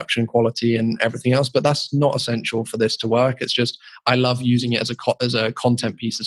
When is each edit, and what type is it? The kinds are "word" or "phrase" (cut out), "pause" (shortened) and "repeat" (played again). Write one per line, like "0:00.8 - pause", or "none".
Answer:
none